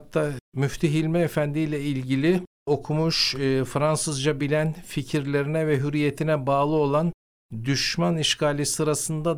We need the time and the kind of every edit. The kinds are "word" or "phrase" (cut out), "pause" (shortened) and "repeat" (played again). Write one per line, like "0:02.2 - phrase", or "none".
none